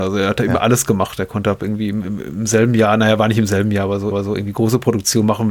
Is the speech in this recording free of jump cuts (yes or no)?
no